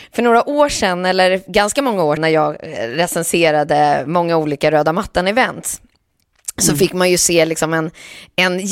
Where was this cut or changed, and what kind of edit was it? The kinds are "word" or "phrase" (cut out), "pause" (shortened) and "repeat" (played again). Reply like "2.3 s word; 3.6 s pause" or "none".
2.2 s word